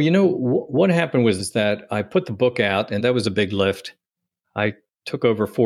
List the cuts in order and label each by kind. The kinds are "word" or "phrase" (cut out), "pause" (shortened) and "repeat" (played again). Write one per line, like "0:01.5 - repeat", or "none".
0:01.4 - word
0:03.0 - word